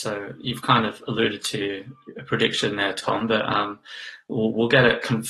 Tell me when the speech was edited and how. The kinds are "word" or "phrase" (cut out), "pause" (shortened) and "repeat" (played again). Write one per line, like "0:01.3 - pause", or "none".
none